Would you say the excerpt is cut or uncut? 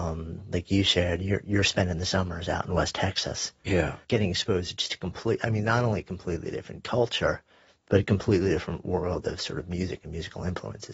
cut